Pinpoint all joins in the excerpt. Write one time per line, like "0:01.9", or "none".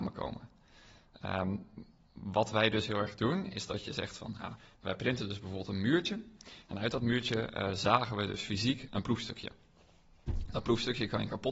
0:08.9